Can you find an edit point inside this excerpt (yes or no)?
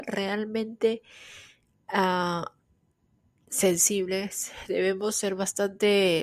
no